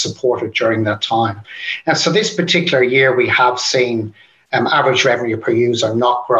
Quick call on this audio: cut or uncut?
uncut